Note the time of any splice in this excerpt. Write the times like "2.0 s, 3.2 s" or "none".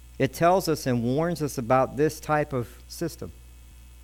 2.8 s